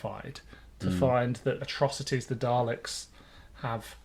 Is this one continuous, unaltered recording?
no; 1 cut; at 1.6 s

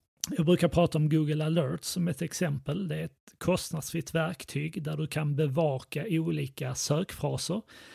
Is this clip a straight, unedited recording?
yes; 0 cuts

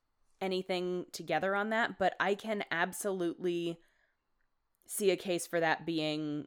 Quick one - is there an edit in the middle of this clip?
no; 0 cuts

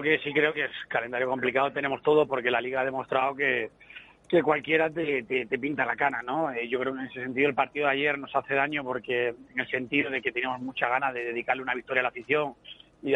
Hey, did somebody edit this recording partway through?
no; 0 cuts

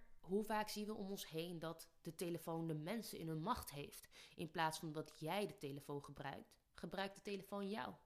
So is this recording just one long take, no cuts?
yes; 0 cuts

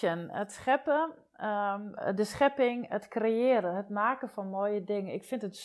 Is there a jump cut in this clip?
no; 0 cuts

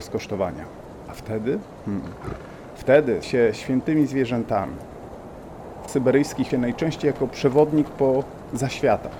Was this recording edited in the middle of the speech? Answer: yes; 3 cuts; at 3.2 s, 5.9 s, 6.5 s

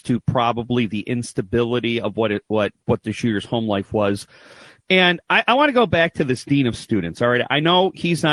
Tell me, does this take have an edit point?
no; 0 cuts

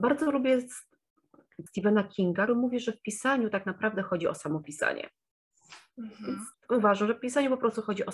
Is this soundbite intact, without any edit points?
no; 3 cuts; at 1.7 s, 2.5 s, 6.5 s

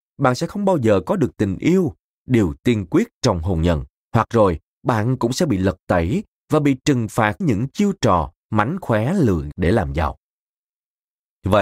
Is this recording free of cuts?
no; 3 cuts; at 4.0 s, 7.4 s, 9.5 s

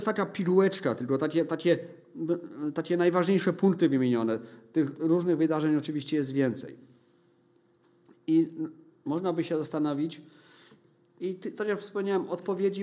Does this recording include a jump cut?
no; 0 cuts

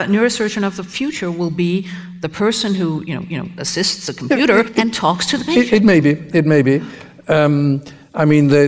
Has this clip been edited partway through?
yes; 2 cuts; at 3.3 s, 4.7 s

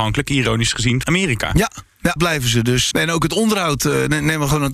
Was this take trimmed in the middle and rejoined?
yes; 3 cuts; at 1.0 s, 2.2 s, 2.9 s

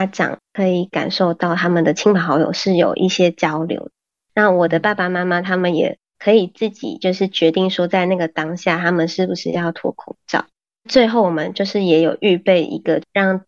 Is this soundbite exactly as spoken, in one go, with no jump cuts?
yes; 0 cuts

